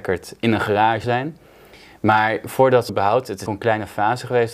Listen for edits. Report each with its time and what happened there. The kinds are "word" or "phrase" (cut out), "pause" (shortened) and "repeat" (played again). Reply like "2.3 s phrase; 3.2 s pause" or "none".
1.0 s word; 2.9 s word; 3.5 s word

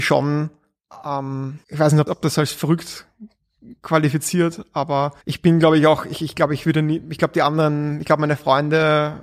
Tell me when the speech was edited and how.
1.6 s pause; 2.1 s word; 5.2 s pause

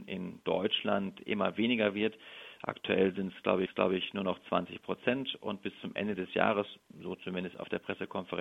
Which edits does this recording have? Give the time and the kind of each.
3.7 s repeat

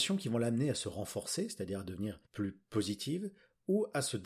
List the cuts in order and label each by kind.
2.2 s pause

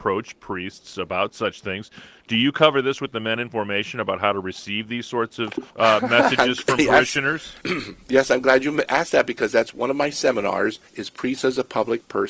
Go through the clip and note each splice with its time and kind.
5.7 s pause; 7.6 s pause; 10.9 s pause

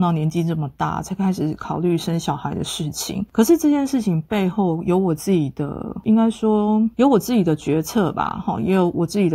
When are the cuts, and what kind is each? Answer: 6.9 s word

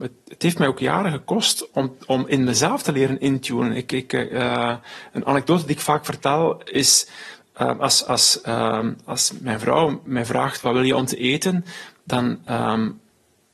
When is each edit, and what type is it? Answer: none

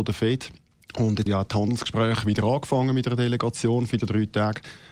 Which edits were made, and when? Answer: 1.3 s word; 4.0 s word

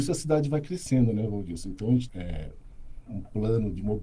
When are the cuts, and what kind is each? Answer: 2.1 s word

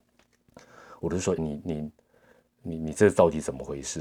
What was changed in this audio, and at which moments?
1.4 s phrase

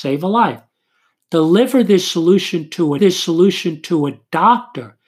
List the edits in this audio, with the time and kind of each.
3.0 s repeat

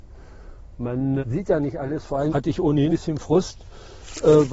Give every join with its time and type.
1.2 s word; 2.3 s word; 2.9 s word

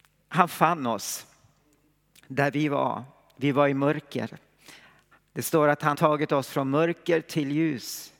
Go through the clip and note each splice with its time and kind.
5.9 s word

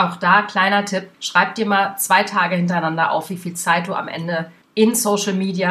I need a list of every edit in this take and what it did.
1.1 s pause

